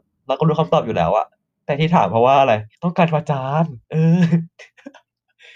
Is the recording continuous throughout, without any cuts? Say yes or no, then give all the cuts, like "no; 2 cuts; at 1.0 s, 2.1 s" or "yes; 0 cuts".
no; 2 cuts; at 2.7 s, 3.8 s